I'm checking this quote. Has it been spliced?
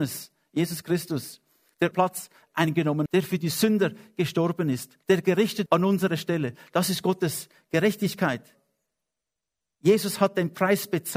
yes; 4 cuts; at 1.9 s, 3.1 s, 5.0 s, 5.7 s

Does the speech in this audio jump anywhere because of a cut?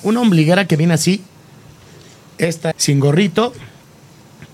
yes; 1 cut; at 2.7 s

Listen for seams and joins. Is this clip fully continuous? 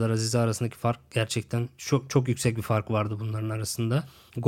yes; 0 cuts

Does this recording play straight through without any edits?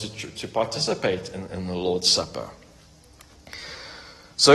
yes; 0 cuts

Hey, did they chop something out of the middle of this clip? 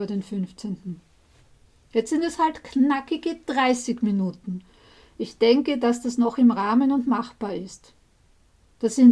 no; 0 cuts

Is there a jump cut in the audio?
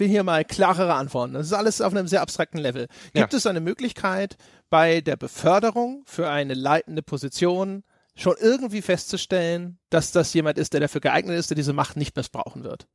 no; 0 cuts

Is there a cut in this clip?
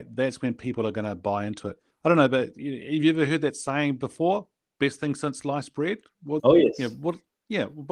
yes; 2 cuts; at 1.9 s, 6.4 s

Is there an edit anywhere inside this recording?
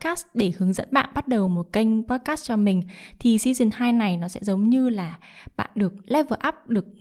no; 0 cuts

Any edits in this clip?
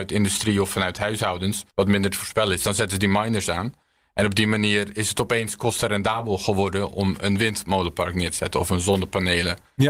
yes; 1 cut; at 1.7 s

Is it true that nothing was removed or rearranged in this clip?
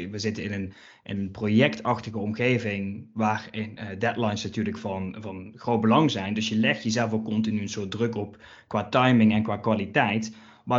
yes; 0 cuts

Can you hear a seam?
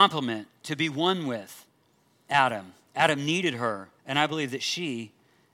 yes; 1 cut; at 4.0 s

